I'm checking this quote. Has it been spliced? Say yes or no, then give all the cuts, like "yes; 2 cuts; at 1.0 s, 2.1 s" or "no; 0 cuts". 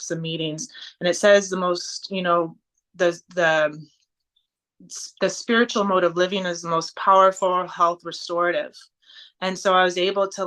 no; 0 cuts